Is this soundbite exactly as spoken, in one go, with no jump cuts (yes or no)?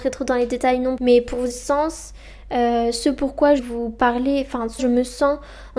no